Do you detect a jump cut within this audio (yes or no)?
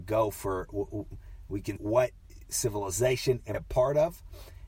yes